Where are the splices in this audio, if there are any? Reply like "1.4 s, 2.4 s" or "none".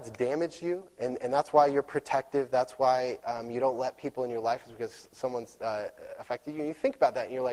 none